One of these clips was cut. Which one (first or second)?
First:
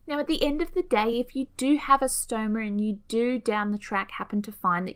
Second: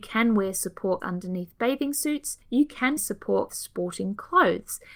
second